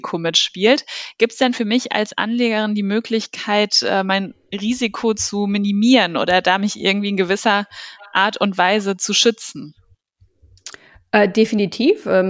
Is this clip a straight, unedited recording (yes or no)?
yes